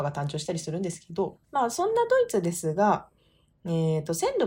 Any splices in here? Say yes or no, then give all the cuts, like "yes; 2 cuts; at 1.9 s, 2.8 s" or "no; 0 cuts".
yes; 1 cut; at 1.4 s